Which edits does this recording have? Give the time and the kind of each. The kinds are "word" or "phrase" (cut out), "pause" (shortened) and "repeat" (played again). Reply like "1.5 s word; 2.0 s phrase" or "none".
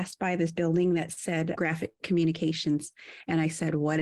1.6 s word